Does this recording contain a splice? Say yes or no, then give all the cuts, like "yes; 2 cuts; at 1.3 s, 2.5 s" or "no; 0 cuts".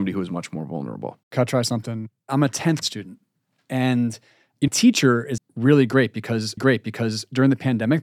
yes; 5 cuts; at 1.2 s, 2.8 s, 4.7 s, 5.4 s, 6.6 s